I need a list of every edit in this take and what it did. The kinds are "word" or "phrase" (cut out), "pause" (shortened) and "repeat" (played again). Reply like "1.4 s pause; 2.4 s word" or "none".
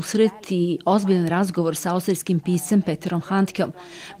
none